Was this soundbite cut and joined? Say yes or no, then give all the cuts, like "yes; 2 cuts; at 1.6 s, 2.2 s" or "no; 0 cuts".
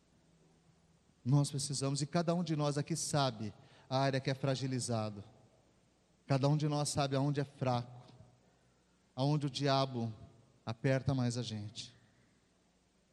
no; 0 cuts